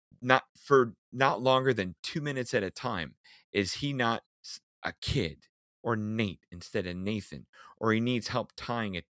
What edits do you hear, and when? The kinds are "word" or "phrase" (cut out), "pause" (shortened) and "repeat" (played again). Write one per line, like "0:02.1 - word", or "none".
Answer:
none